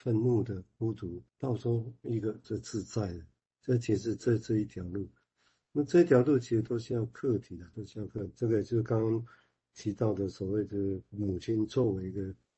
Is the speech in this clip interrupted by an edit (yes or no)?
yes